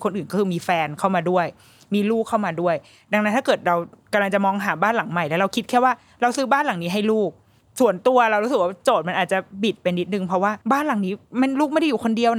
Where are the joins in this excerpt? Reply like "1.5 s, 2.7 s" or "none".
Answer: 10.6 s